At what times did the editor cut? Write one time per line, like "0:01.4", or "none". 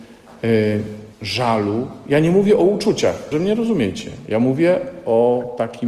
0:01.1
0:03.3